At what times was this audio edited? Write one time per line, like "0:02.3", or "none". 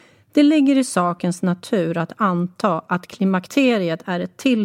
none